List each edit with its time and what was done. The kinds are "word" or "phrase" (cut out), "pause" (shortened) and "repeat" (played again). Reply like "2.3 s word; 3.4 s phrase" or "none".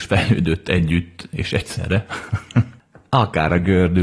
none